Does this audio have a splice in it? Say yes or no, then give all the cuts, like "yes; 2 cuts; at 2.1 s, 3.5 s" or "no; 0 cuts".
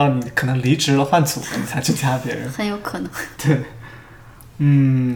no; 0 cuts